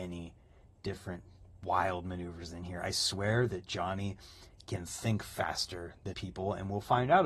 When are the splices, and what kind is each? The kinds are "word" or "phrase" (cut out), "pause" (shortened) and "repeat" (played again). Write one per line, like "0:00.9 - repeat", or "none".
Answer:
0:06.1 - word